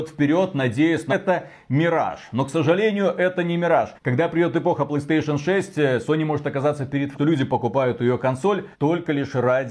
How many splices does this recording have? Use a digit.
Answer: 4